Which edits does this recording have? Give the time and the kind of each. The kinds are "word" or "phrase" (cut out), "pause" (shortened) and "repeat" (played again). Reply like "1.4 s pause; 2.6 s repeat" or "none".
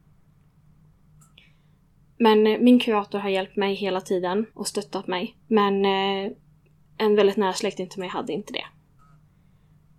4.5 s pause; 5.4 s pause